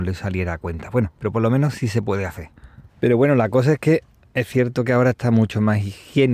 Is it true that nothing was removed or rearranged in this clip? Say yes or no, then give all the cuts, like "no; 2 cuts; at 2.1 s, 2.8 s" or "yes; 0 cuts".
no; 1 cut; at 2.9 s